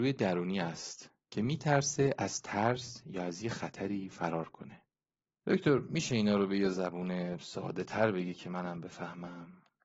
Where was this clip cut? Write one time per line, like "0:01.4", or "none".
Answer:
none